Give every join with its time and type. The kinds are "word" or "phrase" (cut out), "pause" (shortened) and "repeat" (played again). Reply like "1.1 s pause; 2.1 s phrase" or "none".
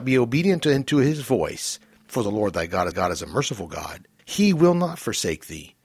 2.9 s repeat; 4.2 s pause